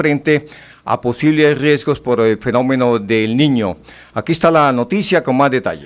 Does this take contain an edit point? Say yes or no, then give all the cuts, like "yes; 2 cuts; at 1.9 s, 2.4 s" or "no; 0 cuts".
no; 0 cuts